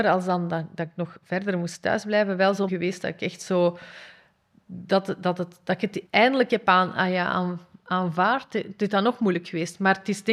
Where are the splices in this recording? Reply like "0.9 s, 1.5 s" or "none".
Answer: 2.7 s, 6.1 s